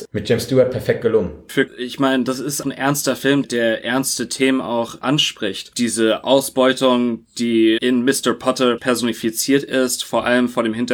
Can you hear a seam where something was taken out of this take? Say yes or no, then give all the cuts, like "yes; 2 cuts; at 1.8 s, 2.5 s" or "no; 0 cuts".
yes; 5 cuts; at 1.7 s, 2.6 s, 3.4 s, 7.8 s, 8.8 s